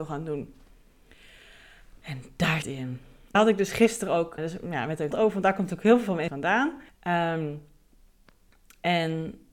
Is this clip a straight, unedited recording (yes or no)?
no